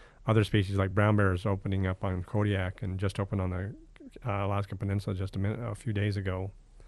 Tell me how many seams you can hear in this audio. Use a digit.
0